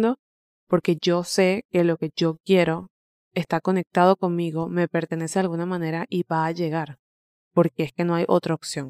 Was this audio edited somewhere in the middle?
no; 0 cuts

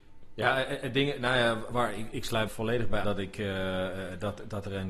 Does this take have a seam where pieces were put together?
yes; 3 cuts; at 1.7 s, 2.5 s, 3.0 s

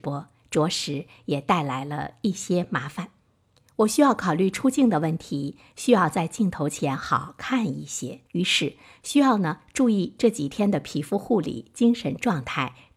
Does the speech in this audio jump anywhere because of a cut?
yes; 2 cuts; at 3.6 s, 8.3 s

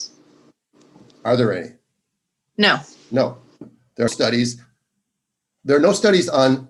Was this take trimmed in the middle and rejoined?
yes; 2 cuts; at 3.0 s, 4.1 s

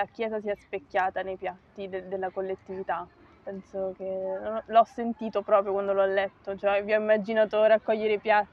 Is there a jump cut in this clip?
no; 0 cuts

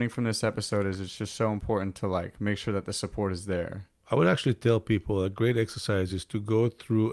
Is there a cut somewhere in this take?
no; 0 cuts

